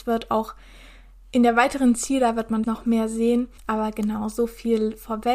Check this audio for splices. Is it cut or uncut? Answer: cut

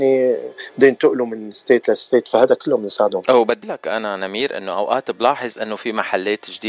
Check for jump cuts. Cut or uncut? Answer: cut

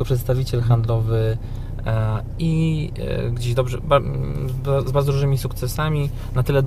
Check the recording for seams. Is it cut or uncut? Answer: uncut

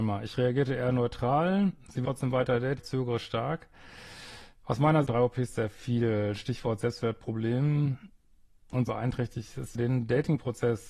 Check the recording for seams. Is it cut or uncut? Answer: cut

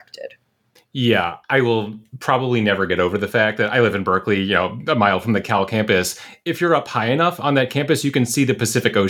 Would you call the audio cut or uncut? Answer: uncut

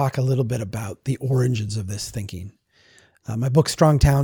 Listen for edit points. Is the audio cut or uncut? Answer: uncut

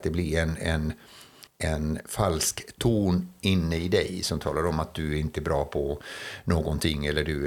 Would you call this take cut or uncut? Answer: cut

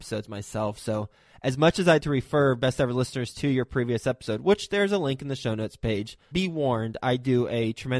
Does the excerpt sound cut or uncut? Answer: cut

